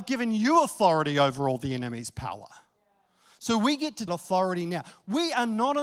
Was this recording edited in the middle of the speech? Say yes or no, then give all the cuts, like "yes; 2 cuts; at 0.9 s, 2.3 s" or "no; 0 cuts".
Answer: yes; 1 cut; at 4.1 s